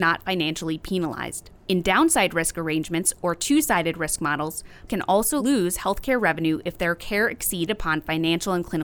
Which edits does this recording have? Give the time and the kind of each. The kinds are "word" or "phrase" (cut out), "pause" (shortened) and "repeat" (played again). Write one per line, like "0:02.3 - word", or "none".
0:01.6 - pause
0:04.9 - word
0:07.7 - word